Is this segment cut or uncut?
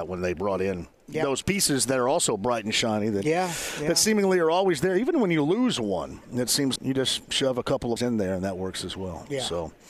cut